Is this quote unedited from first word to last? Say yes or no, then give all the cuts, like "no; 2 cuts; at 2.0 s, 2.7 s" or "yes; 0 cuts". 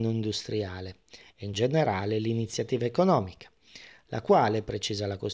yes; 0 cuts